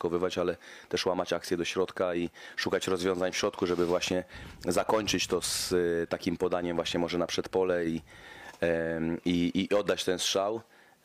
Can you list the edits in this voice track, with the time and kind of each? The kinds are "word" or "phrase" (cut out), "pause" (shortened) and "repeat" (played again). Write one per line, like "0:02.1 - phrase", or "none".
none